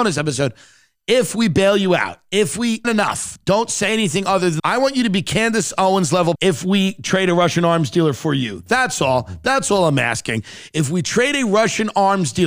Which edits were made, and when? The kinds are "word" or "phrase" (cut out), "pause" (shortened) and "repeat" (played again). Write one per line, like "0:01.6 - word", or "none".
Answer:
0:02.8 - word
0:04.6 - word
0:06.4 - word